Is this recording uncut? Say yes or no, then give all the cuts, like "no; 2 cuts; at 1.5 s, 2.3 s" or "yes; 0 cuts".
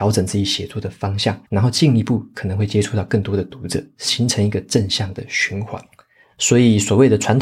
no; 1 cut; at 1.4 s